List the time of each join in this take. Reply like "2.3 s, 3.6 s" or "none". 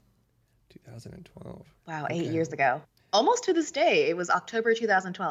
1.8 s, 3.0 s